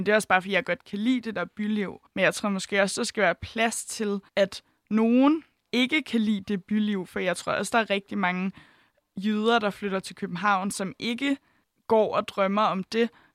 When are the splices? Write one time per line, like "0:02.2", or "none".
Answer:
0:02.1
0:04.3
0:11.6